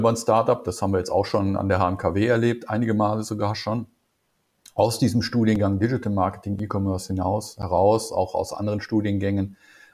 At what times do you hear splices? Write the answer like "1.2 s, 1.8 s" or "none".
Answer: none